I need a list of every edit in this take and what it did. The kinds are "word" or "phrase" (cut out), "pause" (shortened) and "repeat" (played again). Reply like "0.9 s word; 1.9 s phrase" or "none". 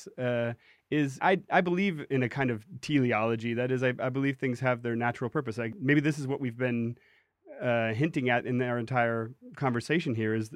none